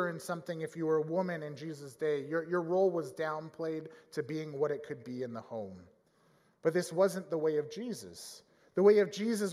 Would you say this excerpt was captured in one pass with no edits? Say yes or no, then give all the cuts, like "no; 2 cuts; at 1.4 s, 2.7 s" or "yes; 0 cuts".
yes; 0 cuts